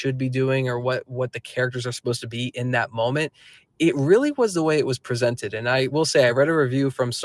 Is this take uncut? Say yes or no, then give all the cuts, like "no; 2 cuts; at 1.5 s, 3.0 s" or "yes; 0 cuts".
yes; 0 cuts